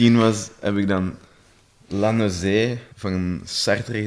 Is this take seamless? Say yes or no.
no